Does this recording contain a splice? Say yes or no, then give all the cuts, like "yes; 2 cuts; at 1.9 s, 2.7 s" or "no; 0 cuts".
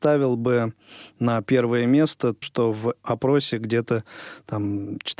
yes; 2 cuts; at 2.4 s, 3.0 s